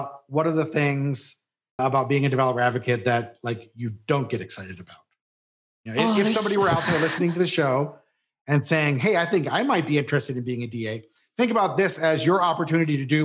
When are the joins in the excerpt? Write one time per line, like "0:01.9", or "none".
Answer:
0:01.8